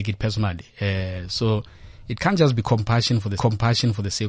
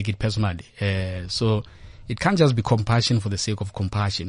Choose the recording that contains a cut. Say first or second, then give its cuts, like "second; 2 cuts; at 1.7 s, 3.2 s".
first; 1 cut; at 3.4 s